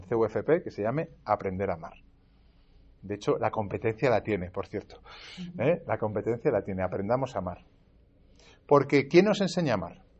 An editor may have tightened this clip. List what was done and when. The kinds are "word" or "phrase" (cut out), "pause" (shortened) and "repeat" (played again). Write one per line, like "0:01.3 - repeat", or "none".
none